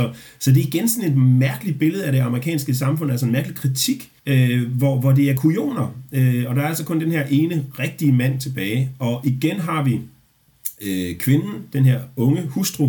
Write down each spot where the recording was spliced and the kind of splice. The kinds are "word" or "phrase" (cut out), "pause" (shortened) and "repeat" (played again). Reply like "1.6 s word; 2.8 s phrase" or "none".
4.2 s pause